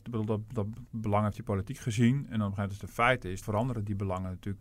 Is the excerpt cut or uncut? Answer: cut